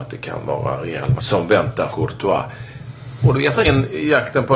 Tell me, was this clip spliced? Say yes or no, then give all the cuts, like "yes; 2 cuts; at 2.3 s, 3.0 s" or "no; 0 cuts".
yes; 3 cuts; at 1.2 s, 1.9 s, 3.6 s